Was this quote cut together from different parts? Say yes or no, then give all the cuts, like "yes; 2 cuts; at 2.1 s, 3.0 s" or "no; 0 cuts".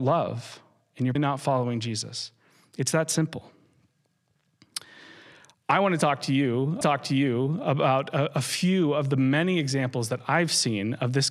yes; 2 cuts; at 1.1 s, 6.8 s